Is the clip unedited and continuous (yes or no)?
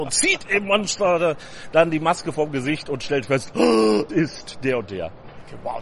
no